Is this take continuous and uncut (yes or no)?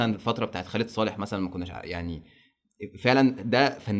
yes